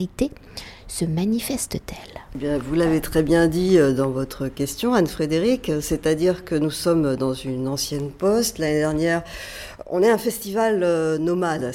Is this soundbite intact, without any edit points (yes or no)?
yes